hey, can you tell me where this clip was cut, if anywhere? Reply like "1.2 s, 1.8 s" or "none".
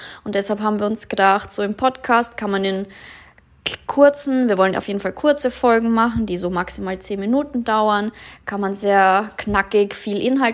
none